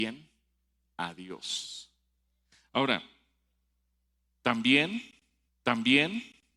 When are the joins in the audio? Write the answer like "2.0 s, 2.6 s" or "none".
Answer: 5.5 s